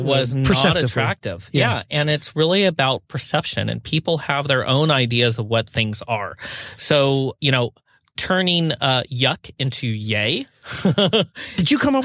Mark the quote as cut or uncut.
uncut